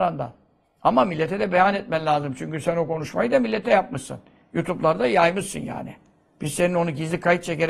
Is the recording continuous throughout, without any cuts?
yes; 0 cuts

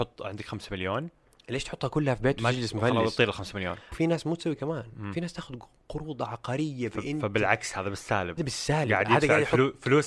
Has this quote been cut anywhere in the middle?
yes; 3 cuts; at 3.9 s, 4.6 s, 8.4 s

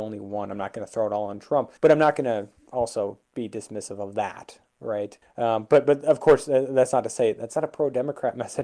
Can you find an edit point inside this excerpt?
yes; 2 cuts; at 1.8 s, 5.2 s

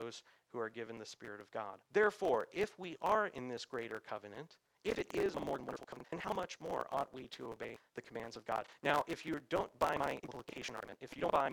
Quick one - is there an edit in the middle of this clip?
yes; 2 cuts; at 1.9 s, 5.6 s

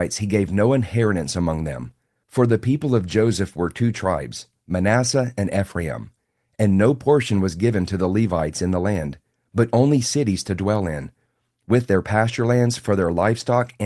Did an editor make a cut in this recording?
no; 0 cuts

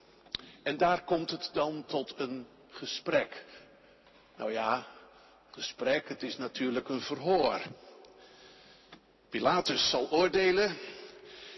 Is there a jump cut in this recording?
no; 0 cuts

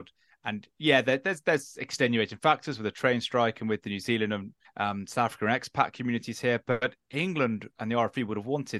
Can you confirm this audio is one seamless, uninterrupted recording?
no; 2 cuts; at 4.6 s, 7.0 s

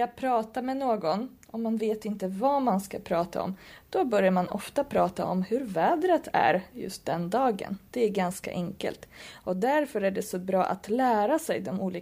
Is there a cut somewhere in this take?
yes; 1 cut; at 7.9 s

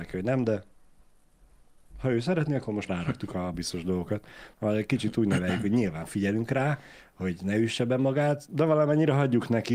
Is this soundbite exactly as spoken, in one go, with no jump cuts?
no; 3 cuts; at 2.9 s, 3.5 s, 8.5 s

